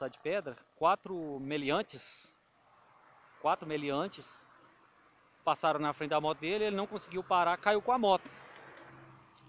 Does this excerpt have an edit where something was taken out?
no; 0 cuts

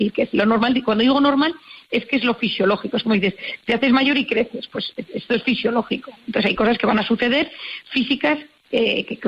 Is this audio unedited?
yes; 0 cuts

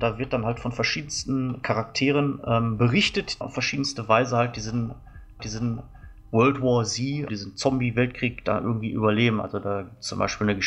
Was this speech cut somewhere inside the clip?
yes; 3 cuts; at 3.4 s, 5.4 s, 7.3 s

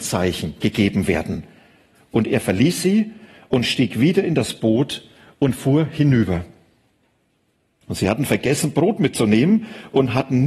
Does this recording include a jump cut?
no; 0 cuts

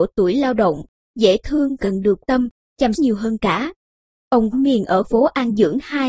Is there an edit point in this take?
yes; 6 cuts; at 1.4 s, 1.8 s, 2.2 s, 3.0 s, 4.5 s, 5.0 s

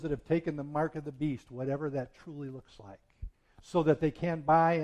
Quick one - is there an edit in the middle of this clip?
no; 0 cuts

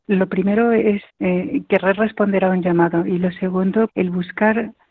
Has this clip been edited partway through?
yes; 2 cuts; at 1.1 s, 3.9 s

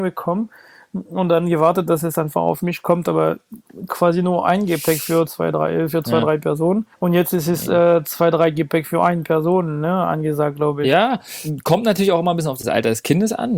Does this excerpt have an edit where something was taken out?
yes; 1 cut; at 6.9 s

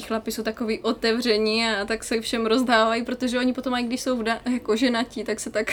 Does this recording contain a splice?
no; 0 cuts

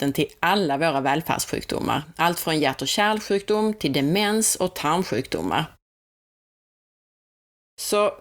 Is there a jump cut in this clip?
no; 0 cuts

